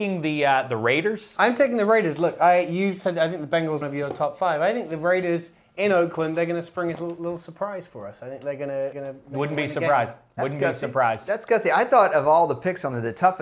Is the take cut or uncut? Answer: cut